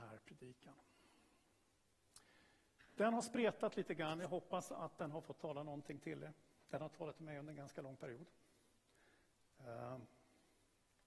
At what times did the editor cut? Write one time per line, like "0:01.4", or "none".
none